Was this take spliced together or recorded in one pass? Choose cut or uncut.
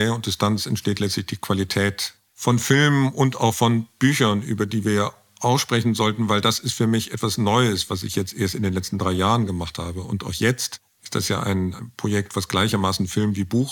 uncut